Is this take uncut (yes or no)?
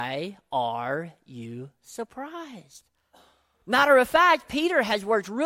yes